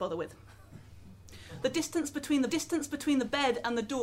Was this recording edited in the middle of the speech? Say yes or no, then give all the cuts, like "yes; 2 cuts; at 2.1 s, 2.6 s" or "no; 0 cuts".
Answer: yes; 1 cut; at 2.5 s